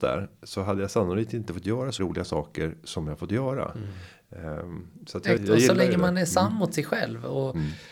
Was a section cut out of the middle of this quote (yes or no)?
yes